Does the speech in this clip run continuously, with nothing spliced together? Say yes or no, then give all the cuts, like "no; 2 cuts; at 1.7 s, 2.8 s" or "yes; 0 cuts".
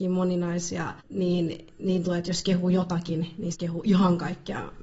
no; 3 cuts; at 1.0 s, 2.1 s, 3.5 s